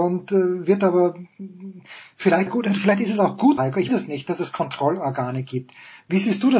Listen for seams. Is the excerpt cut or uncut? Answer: cut